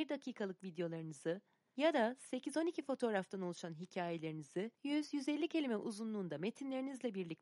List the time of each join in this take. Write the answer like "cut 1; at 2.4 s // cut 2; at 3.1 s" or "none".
cut 1; at 4.7 s